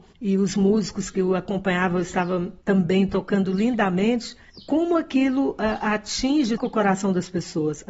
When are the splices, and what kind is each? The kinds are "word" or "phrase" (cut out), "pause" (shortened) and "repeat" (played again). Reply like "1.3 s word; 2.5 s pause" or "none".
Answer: 6.6 s word